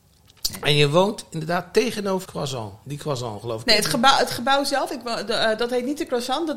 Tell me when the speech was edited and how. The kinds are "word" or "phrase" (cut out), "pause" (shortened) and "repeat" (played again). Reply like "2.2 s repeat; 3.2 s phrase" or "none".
2.2 s word